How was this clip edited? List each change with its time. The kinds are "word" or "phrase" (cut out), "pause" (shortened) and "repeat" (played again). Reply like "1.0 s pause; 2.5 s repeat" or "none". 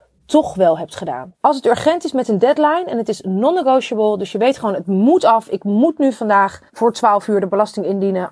1.4 s pause; 6.7 s pause